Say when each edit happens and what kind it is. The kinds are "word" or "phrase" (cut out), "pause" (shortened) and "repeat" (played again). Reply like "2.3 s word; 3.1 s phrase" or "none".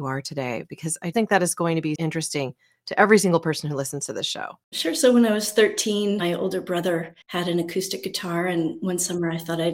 1.1 s word; 2.0 s word; 4.6 s pause; 7.2 s pause